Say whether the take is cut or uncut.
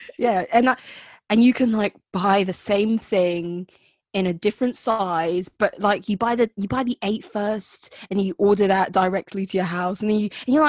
uncut